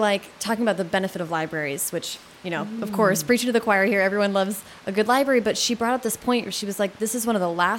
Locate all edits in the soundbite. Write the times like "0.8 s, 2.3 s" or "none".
none